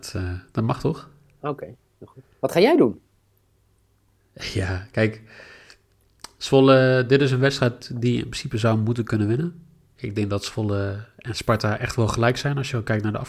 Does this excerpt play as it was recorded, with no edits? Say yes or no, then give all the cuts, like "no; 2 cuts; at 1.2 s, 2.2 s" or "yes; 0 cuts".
yes; 0 cuts